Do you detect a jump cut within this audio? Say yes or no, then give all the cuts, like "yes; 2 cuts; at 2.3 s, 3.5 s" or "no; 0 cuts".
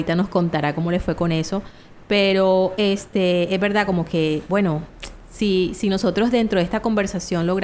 no; 0 cuts